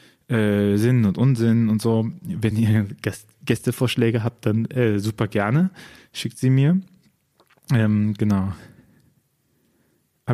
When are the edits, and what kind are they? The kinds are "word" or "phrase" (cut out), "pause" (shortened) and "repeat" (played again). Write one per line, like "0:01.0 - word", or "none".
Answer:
none